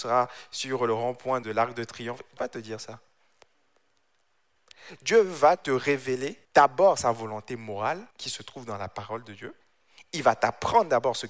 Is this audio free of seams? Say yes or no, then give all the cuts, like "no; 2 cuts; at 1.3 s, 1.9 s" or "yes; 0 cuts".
no; 4 cuts; at 1.4 s, 2.4 s, 6.4 s, 8.1 s